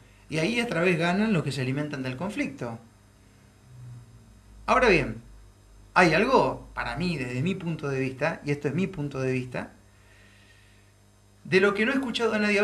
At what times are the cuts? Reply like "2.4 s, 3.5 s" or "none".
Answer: none